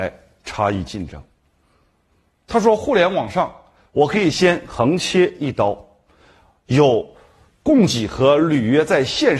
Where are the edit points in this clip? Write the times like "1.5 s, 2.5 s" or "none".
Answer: none